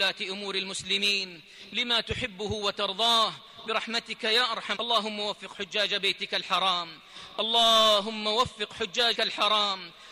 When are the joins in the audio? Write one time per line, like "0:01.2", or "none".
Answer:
0:04.8
0:09.1